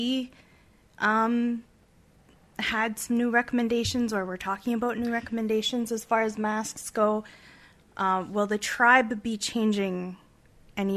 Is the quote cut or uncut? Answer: uncut